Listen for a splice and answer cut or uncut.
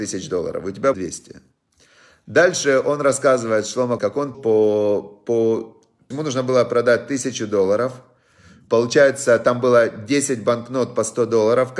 cut